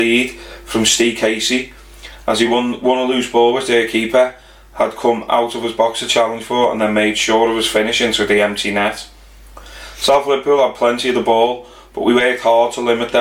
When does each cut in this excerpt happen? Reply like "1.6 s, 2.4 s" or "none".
none